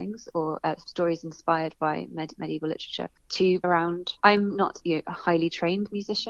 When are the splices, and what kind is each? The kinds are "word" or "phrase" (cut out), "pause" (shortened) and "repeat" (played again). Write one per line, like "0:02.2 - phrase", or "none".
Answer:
0:02.4 - word
0:03.6 - word
0:04.2 - pause
0:04.8 - word